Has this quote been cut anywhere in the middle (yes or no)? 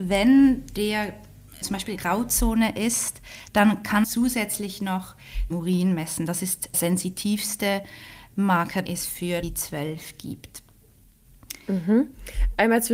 yes